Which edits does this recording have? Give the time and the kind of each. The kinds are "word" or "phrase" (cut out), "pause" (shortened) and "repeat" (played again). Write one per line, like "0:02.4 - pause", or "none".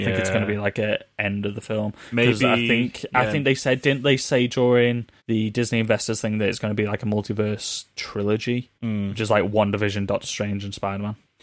0:05.2 - pause
0:08.8 - pause